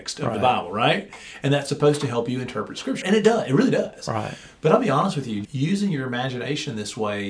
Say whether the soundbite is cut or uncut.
cut